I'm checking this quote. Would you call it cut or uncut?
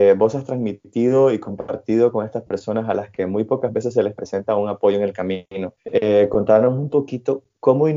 cut